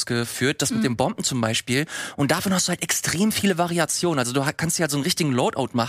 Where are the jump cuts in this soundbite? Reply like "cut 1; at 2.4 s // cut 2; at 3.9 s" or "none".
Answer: none